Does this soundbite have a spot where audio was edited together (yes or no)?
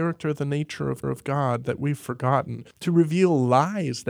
yes